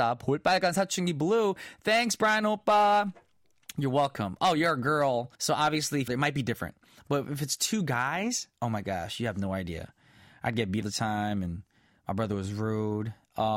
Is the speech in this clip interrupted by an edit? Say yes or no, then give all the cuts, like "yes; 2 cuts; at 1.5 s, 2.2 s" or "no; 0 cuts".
yes; 3 cuts; at 5.3 s, 6.1 s, 10.8 s